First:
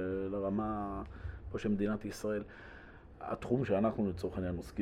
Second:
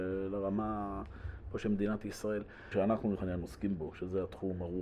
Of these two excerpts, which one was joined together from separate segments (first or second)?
second